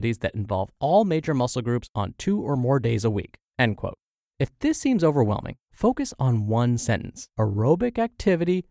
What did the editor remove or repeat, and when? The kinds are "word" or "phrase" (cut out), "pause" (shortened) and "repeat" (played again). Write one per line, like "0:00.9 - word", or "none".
0:03.5 - pause
0:04.1 - pause
0:05.6 - pause
0:07.3 - pause